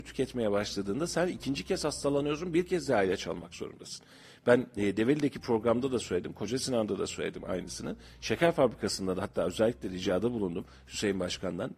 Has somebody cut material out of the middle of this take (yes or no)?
no